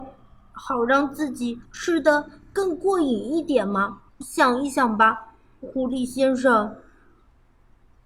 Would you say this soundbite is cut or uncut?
cut